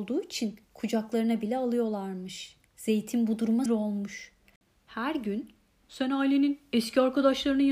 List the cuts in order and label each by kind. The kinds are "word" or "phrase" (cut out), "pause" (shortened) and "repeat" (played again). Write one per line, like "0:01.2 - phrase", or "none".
0:02.7 - pause
0:03.7 - word
0:05.8 - word

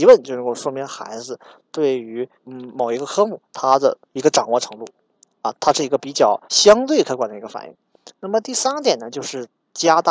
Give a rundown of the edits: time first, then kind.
0:02.4 - pause
0:04.0 - pause
0:06.4 - pause

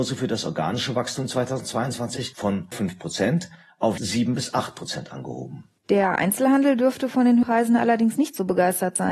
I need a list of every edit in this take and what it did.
0:02.7 - word
0:04.0 - word
0:07.4 - word

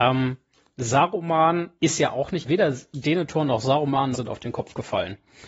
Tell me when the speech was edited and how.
0:01.8 - pause
0:02.4 - word
0:04.1 - phrase

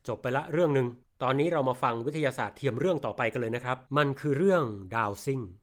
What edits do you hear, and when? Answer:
0:01.0 - pause
0:03.9 - pause

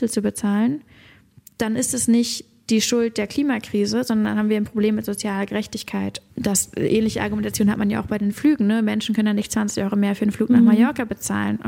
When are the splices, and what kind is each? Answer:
none

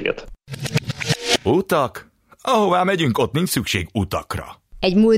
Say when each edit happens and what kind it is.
none

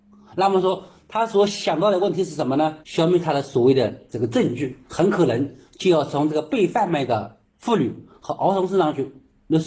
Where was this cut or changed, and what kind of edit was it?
0:02.8 - pause
0:04.8 - pause

